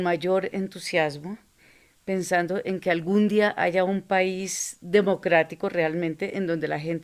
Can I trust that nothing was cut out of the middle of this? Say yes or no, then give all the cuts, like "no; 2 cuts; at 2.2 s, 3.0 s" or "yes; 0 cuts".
yes; 0 cuts